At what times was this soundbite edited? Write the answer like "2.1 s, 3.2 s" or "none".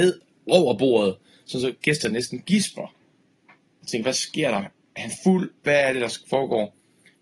none